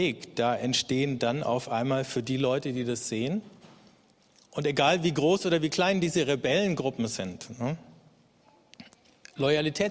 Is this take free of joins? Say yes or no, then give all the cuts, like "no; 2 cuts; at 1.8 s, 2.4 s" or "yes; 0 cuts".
yes; 0 cuts